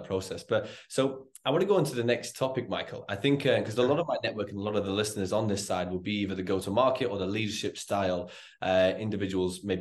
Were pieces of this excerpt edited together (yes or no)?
no